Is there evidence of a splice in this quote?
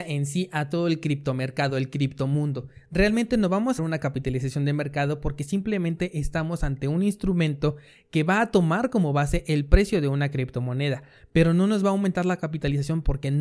yes; 1 cut; at 3.8 s

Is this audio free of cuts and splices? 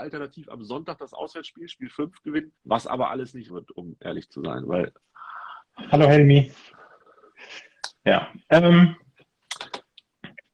no; 3 cuts; at 2.6 s, 3.5 s, 8.0 s

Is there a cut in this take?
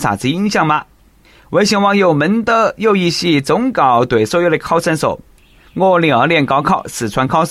no; 0 cuts

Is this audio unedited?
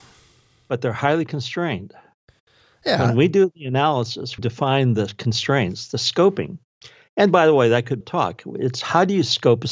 no; 2 cuts; at 4.4 s, 8.0 s

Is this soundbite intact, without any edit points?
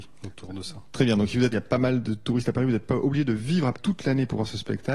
no; 2 cuts; at 1.5 s, 3.7 s

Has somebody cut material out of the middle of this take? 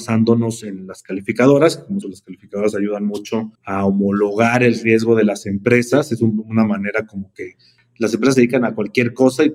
yes; 2 cuts; at 2.0 s, 3.5 s

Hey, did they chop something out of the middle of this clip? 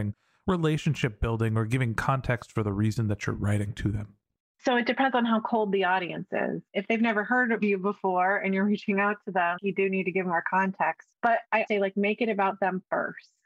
yes; 4 cuts; at 6.7 s, 9.6 s, 11.1 s, 11.7 s

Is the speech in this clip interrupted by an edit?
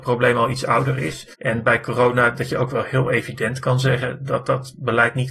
yes; 1 cut; at 1.3 s

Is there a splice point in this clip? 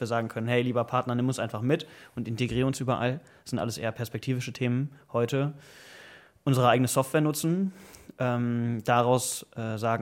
no; 0 cuts

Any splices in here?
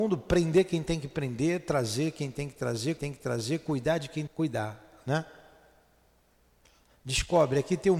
yes; 2 cuts; at 3.0 s, 4.3 s

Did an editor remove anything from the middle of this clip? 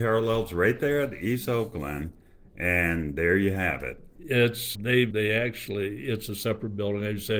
yes; 2 cuts; at 4.7 s, 5.1 s

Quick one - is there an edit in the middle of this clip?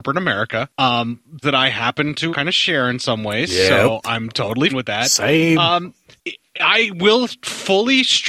yes; 3 cuts; at 1.4 s, 2.3 s, 4.7 s

